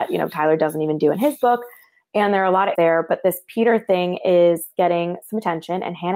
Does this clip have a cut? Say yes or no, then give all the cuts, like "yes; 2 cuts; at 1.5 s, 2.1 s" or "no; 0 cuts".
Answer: yes; 1 cut; at 2.7 s